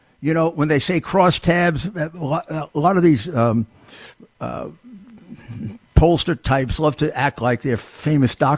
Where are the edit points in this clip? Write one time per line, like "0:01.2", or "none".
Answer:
none